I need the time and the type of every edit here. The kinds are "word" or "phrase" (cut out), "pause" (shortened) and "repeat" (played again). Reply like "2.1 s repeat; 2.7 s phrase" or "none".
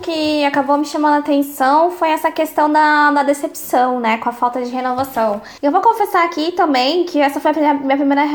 5.6 s pause